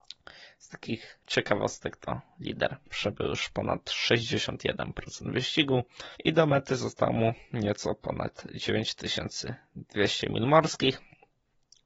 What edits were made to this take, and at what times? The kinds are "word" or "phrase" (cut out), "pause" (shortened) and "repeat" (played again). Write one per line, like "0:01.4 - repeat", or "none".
0:06.1 - pause